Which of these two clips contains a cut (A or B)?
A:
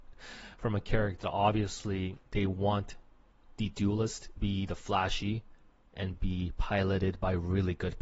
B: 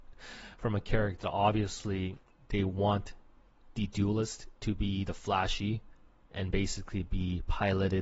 A